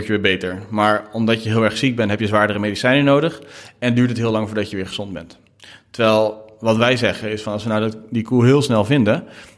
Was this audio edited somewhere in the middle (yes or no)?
no